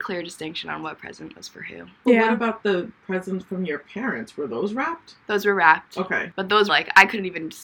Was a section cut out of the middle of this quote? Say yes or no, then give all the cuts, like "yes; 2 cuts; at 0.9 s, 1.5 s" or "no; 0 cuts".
yes; 1 cut; at 6.7 s